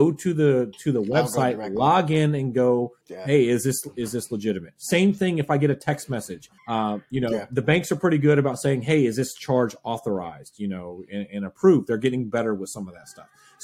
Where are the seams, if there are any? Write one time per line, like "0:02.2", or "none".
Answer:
0:03.0
0:06.6